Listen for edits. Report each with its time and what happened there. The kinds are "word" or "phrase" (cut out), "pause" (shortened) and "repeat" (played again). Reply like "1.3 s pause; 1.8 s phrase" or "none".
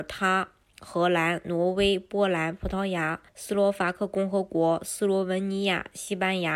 3.3 s pause